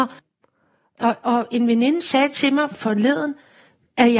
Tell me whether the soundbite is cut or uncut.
cut